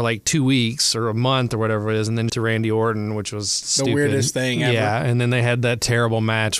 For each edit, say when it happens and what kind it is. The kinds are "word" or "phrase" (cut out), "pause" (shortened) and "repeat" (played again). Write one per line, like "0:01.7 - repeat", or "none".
0:02.3 - phrase
0:03.6 - word